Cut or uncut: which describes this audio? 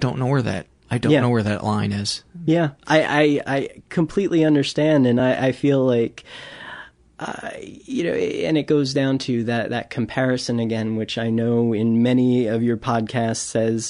uncut